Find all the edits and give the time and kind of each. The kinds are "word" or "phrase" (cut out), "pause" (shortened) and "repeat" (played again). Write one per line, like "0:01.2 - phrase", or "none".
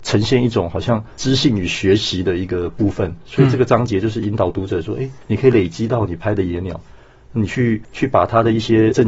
none